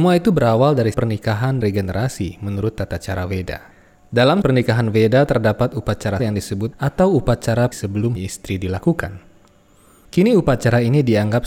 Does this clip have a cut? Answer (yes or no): yes